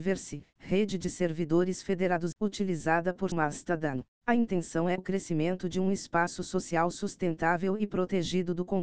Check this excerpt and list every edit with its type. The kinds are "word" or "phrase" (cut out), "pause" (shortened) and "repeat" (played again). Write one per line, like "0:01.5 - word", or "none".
0:02.3 - word
0:03.3 - phrase
0:04.1 - pause
0:05.0 - phrase